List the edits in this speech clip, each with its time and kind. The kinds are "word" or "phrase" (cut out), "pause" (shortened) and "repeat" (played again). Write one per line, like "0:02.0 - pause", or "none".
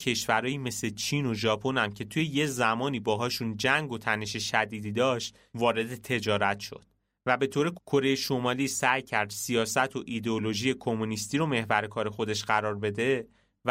0:07.8 - word